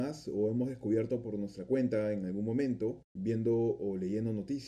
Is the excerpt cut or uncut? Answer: cut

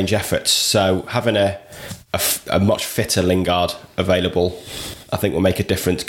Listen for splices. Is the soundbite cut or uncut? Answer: uncut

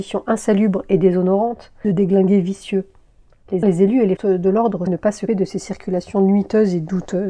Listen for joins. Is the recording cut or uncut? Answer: cut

